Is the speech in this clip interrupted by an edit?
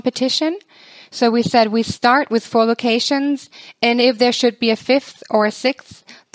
no; 0 cuts

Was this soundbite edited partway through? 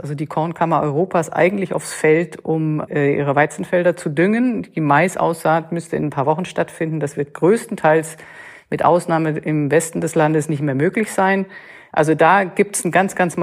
no; 0 cuts

